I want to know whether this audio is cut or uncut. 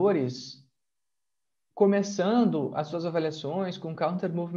uncut